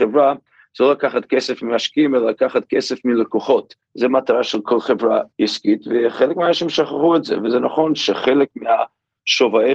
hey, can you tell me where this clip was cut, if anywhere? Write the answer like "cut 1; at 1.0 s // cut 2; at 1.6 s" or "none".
cut 1; at 3.8 s // cut 2; at 5.3 s